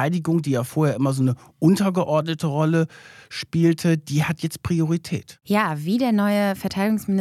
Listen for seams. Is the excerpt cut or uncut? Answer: uncut